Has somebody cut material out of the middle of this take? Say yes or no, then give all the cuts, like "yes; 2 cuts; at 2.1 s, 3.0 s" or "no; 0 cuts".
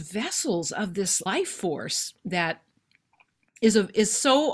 yes; 1 cut; at 1.3 s